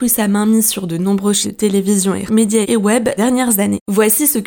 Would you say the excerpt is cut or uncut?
cut